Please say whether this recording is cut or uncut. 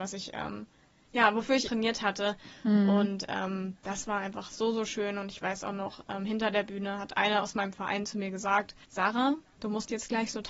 cut